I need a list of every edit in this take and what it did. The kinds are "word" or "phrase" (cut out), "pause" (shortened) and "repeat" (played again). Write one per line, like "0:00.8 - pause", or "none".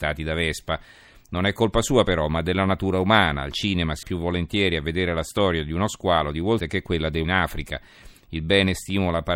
0:04.0 - word
0:06.6 - word
0:07.2 - word